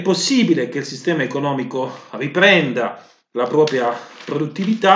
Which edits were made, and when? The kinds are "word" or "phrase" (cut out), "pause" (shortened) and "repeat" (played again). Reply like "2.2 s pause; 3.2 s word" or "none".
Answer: none